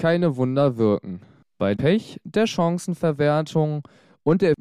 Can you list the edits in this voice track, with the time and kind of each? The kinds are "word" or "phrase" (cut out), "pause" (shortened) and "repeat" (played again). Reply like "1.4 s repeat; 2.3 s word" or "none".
1.8 s word